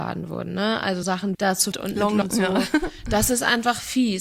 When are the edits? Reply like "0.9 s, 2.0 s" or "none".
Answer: 1.0 s, 1.3 s, 1.7 s, 2.2 s